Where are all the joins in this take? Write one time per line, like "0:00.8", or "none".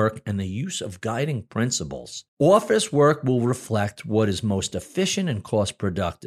0:02.3